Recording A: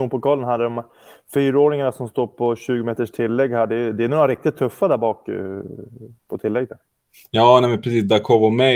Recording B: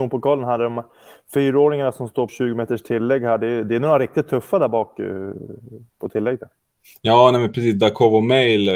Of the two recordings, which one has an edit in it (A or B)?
B